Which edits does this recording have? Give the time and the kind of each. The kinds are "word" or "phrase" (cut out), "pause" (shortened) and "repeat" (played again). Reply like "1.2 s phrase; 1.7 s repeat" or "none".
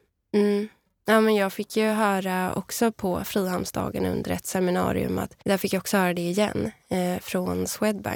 5.4 s pause